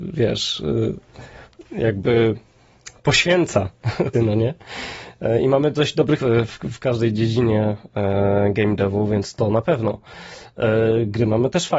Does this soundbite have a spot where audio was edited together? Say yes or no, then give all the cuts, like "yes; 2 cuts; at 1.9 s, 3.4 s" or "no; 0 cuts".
yes; 3 cuts; at 1.6 s, 4.1 s, 6.2 s